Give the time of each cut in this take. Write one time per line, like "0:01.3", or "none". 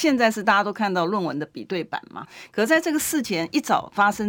0:02.2